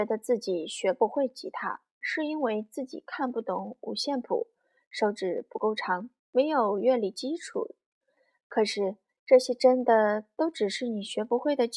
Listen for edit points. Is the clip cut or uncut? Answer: cut